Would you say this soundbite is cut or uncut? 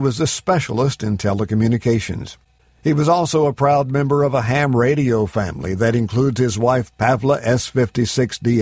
uncut